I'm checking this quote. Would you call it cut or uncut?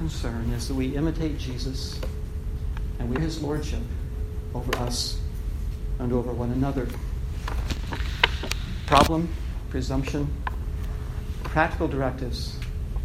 cut